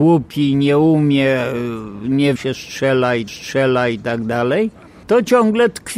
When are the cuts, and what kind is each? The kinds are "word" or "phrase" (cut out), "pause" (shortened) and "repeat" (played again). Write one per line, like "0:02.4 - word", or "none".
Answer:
0:02.4 - phrase
0:03.3 - repeat